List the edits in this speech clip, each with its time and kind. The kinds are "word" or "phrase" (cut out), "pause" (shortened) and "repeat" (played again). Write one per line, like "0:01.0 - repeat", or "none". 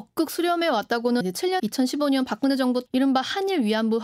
0:01.2 - word
0:01.6 - word
0:02.9 - word